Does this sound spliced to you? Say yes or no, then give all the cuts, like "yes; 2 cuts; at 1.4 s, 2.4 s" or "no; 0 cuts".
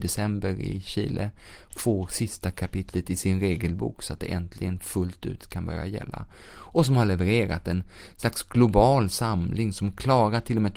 no; 0 cuts